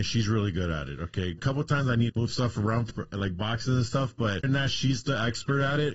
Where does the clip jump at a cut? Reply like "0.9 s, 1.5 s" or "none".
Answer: 1.4 s, 2.1 s, 2.9 s, 4.4 s

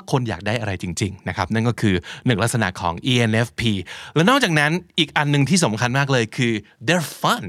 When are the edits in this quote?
none

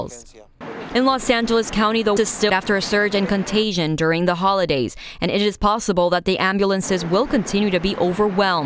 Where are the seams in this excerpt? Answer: 2.2 s, 2.5 s

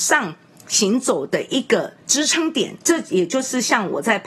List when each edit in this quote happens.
2.8 s

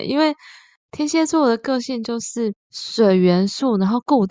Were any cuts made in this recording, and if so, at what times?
2.6 s

